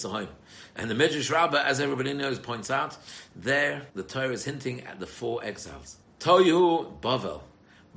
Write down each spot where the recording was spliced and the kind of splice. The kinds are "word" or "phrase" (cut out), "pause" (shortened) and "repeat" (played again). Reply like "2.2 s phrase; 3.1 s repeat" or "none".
3.9 s pause; 6.0 s pause